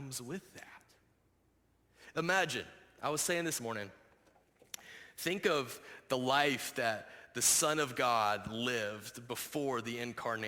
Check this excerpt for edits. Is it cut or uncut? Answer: cut